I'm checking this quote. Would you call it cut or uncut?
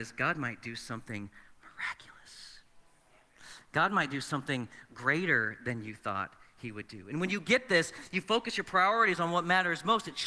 uncut